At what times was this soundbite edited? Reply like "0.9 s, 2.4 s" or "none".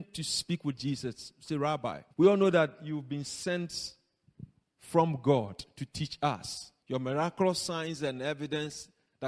2.1 s, 6.8 s